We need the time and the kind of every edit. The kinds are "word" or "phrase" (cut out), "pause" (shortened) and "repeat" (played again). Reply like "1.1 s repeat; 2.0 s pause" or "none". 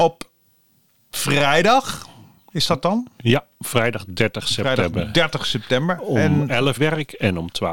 6.8 s word